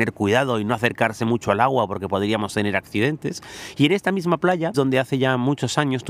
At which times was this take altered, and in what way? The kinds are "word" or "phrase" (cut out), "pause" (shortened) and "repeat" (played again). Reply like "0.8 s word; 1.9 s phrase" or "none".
4.7 s word